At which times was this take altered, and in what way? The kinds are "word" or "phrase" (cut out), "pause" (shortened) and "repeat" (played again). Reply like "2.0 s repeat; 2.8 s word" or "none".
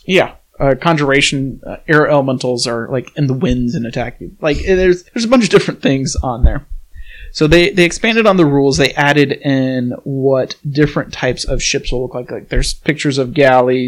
5.1 s pause